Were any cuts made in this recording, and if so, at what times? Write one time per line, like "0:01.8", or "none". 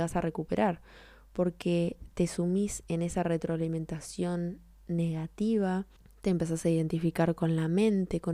none

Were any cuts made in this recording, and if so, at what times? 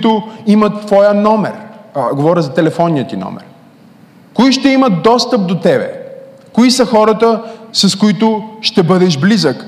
0:03.9
0:07.7

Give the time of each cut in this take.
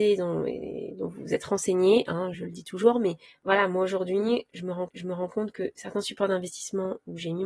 0:02.3
0:03.3
0:04.9

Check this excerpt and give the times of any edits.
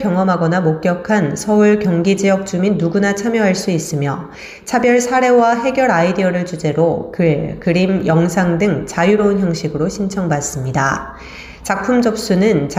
none

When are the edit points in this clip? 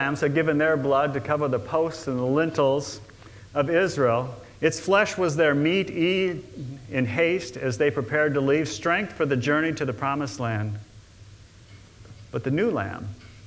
none

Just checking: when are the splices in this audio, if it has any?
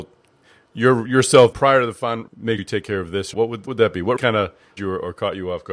0:01.5
0:02.3
0:02.6
0:03.3
0:03.7
0:04.2
0:04.8

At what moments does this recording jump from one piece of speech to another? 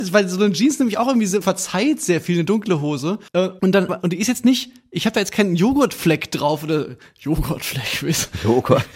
0:01.4
0:03.3
0:03.9

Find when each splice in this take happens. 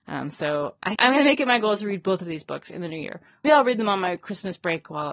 0:01.0
0:03.4

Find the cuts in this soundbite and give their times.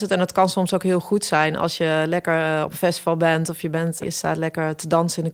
0:04.0

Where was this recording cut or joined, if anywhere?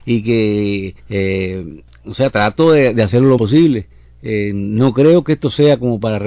0:01.0
0:03.4

